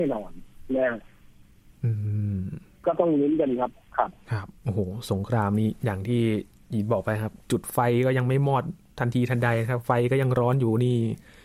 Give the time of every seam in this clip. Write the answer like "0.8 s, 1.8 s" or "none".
none